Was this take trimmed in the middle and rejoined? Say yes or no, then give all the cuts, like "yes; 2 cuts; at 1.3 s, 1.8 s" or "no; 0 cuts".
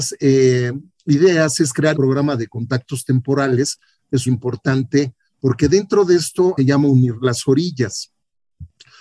yes; 3 cuts; at 1.9 s, 4.3 s, 6.6 s